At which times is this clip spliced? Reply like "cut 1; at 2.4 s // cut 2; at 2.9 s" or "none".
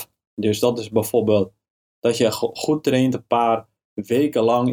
none

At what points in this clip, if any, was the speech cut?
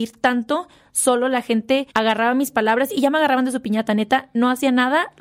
cut 1; at 1.9 s // cut 2; at 2.9 s

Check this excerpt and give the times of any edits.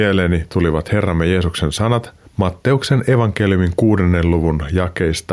cut 1; at 2.2 s

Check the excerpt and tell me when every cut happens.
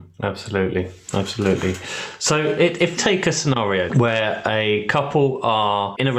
cut 1; at 3.0 s // cut 2; at 3.9 s

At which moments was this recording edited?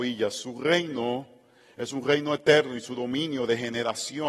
none

